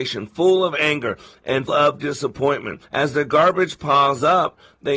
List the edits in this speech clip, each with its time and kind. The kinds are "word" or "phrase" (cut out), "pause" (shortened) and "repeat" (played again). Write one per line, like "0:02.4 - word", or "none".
0:01.7 - word
0:02.8 - pause